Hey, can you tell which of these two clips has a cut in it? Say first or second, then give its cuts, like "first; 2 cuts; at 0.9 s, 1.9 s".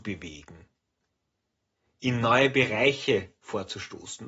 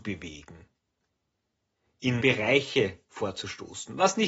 second; 1 cut; at 2.2 s